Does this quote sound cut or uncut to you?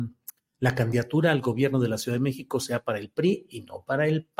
uncut